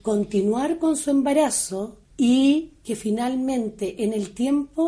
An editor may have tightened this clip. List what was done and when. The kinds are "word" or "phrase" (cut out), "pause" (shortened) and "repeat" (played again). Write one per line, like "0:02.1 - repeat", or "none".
0:02.1 - pause